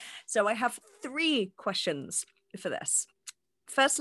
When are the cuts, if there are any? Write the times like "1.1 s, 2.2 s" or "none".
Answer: none